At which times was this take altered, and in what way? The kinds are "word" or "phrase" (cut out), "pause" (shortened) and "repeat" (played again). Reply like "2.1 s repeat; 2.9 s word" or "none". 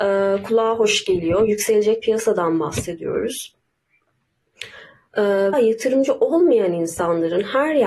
2.0 s word; 5.5 s phrase